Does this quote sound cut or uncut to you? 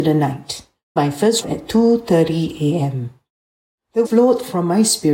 cut